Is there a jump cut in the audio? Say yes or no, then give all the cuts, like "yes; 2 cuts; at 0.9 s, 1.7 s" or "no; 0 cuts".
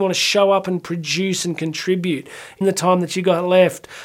yes; 1 cut; at 2.6 s